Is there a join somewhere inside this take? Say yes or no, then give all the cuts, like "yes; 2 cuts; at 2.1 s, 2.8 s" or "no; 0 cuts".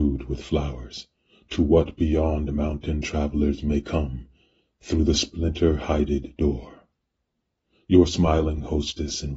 no; 0 cuts